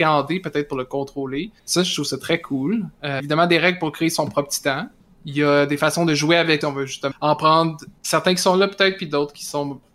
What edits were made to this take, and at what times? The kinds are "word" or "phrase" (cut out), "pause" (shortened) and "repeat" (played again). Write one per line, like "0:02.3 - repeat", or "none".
0:01.6 - pause
0:03.2 - phrase
0:05.0 - pause
0:06.6 - phrase
0:07.1 - word
0:08.0 - pause